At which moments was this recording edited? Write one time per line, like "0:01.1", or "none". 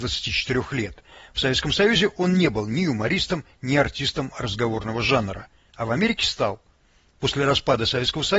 none